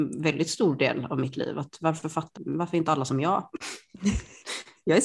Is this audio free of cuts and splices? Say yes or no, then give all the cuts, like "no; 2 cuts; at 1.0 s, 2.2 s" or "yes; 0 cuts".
no; 1 cut; at 2.4 s